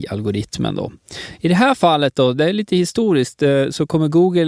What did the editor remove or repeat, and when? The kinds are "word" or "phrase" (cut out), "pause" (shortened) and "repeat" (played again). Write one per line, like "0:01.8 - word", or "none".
none